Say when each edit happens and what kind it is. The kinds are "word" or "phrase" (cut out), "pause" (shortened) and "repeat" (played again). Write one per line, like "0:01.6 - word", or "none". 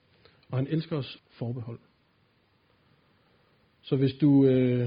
0:01.2 - word

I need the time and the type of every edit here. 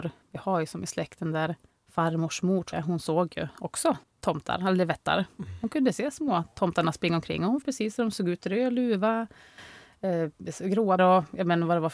0:01.7 - pause
0:02.7 - word
0:04.0 - pause
0:07.6 - word
0:11.0 - word

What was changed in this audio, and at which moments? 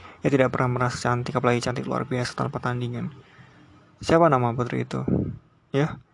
none

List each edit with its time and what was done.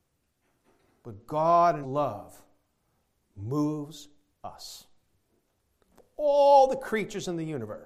0:01.8 - word
0:04.3 - word

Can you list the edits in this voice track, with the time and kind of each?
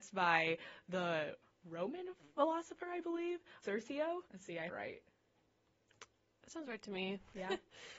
0:01.4 - pause
0:03.6 - word
0:04.3 - pause
0:04.7 - phrase

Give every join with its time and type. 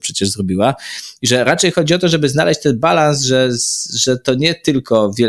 none

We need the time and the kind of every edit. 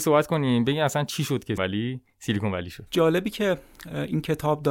0:01.6 - word
0:02.9 - word

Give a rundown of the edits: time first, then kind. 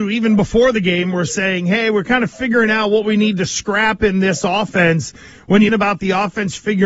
0:05.7 - word

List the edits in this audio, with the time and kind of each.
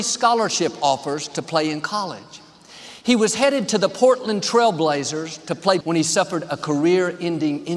0:05.8 - word

